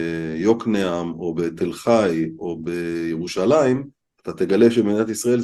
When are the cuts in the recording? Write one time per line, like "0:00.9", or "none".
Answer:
0:04.0